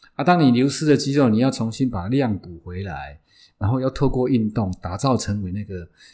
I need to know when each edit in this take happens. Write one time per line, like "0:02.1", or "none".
none